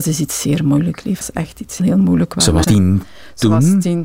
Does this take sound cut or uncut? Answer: cut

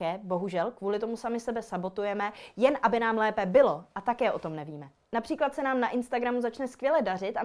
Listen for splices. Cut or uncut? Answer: uncut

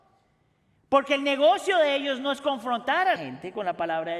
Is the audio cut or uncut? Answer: cut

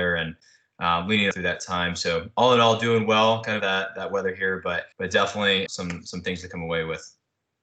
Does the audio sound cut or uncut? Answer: cut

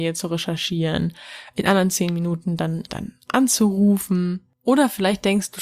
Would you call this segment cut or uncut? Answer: cut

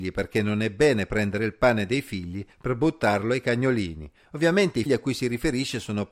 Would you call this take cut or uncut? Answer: cut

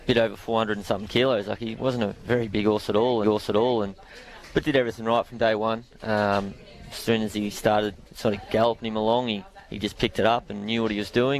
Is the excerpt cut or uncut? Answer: cut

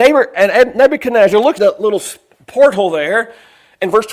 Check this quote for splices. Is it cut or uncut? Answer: cut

